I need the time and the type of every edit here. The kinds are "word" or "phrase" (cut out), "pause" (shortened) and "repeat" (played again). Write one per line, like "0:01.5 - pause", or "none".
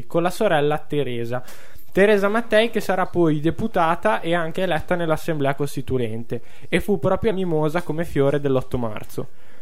0:07.3 - phrase